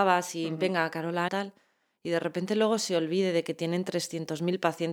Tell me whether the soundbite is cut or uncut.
cut